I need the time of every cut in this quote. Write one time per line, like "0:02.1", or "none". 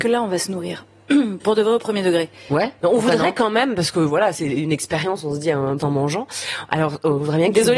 0:01.4
0:05.8